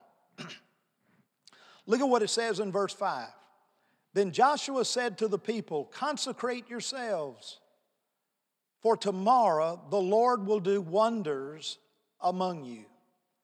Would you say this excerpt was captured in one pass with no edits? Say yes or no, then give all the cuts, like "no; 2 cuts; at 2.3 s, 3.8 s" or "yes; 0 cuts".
yes; 0 cuts